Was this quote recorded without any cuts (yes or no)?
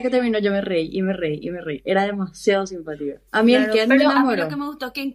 no